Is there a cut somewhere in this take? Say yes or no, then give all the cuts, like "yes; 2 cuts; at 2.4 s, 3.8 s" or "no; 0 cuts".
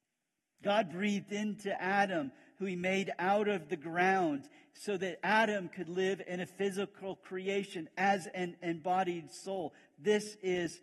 no; 0 cuts